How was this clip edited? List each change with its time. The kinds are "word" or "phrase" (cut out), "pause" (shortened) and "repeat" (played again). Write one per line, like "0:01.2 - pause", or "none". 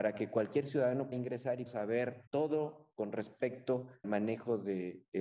0:01.1 - word
0:01.7 - word
0:02.3 - pause
0:04.0 - word